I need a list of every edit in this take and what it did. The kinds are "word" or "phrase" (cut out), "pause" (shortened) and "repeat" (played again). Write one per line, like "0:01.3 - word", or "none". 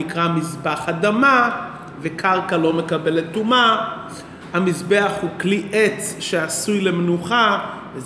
none